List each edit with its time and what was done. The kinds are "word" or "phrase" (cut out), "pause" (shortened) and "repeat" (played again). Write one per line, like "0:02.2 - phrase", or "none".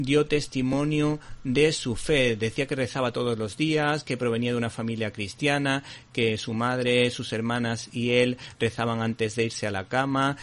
none